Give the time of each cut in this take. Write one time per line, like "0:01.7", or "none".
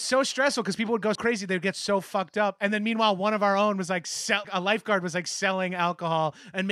0:01.1
0:04.4